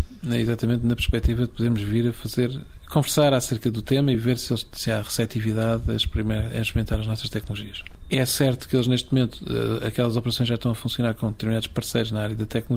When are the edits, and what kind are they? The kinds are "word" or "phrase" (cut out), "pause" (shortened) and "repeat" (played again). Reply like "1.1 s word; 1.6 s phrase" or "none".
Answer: none